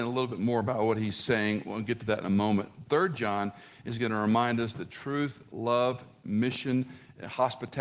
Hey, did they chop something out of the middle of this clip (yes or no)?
no